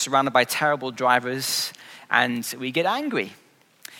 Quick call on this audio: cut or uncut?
uncut